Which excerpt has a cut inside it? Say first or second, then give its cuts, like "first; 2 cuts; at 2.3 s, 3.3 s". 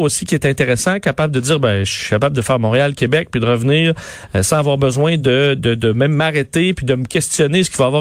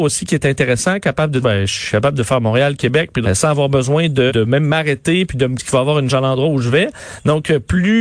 second; 5 cuts; at 1.4 s, 3.2 s, 4.3 s, 5.6 s, 6.1 s